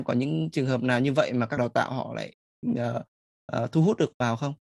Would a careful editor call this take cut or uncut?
cut